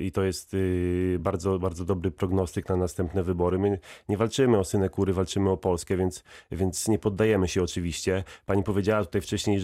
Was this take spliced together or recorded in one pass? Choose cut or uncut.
uncut